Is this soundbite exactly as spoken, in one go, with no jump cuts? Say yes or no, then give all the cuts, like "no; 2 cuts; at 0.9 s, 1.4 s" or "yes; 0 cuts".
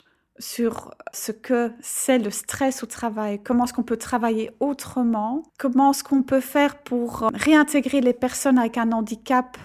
no; 1 cut; at 5.5 s